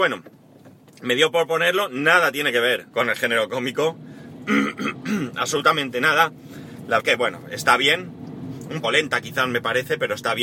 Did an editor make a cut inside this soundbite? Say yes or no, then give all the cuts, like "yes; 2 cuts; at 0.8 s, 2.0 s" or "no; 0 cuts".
yes; 3 cuts; at 2.9 s, 7.0 s, 8.8 s